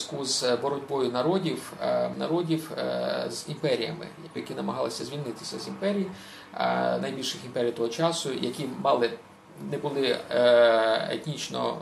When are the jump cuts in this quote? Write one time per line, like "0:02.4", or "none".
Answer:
0:02.1
0:04.4